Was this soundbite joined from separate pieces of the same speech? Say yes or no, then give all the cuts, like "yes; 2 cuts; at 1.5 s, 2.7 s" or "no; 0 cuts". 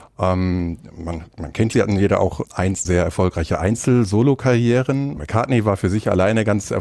yes; 4 cuts; at 1.7 s, 2.4 s, 2.8 s, 5.2 s